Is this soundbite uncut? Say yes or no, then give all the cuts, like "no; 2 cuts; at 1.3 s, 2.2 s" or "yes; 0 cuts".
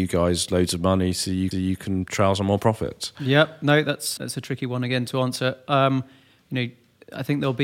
no; 2 cuts; at 1.5 s, 4.2 s